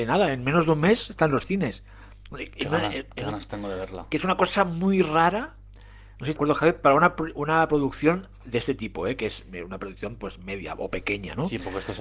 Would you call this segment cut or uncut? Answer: cut